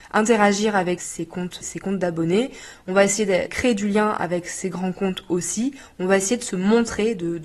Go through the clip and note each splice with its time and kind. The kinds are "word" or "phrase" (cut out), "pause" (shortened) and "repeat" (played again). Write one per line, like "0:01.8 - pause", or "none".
0:01.0 - word
0:01.6 - word
0:03.5 - word